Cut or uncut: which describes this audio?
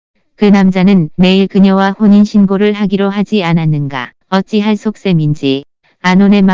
cut